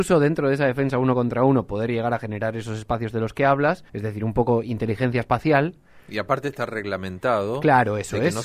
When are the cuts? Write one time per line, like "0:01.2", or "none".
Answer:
0:03.9